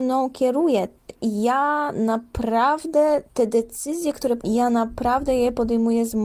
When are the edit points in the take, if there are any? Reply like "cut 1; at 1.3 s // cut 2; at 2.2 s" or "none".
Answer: cut 1; at 1.1 s // cut 2; at 3.3 s // cut 3; at 4.4 s